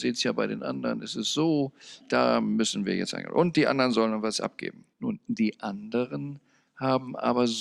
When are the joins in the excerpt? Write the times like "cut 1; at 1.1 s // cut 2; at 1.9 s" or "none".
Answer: cut 1; at 4.9 s